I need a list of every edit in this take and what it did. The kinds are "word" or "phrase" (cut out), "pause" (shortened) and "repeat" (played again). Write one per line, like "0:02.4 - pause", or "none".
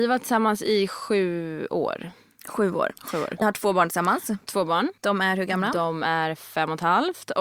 0:03.4 - word
0:05.0 - pause